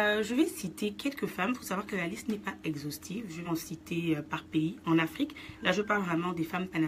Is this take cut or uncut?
cut